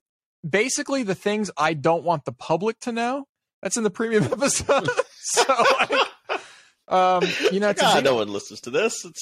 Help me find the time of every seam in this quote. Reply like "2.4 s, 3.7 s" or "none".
none